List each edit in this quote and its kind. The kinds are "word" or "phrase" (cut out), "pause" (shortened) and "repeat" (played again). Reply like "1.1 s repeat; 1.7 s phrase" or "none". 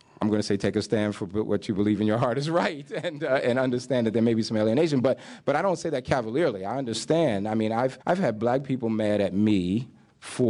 8.0 s pause